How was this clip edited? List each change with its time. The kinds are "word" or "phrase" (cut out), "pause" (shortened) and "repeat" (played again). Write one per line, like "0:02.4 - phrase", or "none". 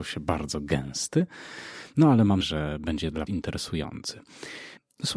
0:02.4 - word
0:03.3 - word

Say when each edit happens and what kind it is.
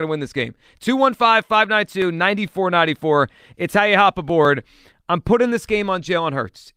none

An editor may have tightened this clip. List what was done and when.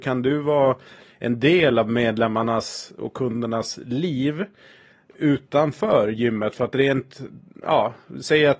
none

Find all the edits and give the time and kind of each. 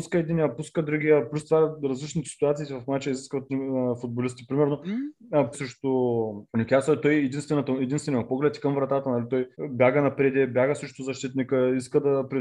0:03.5 - word
0:05.5 - phrase
0:06.5 - pause
0:09.5 - pause

